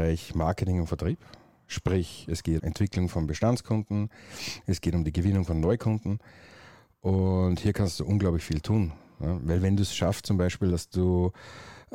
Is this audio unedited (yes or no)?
no